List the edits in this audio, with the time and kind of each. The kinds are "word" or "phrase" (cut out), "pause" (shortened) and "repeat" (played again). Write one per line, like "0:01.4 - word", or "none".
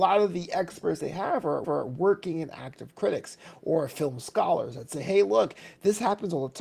0:01.6 - repeat